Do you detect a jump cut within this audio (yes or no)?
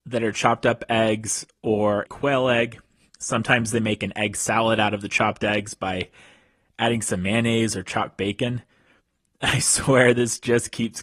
yes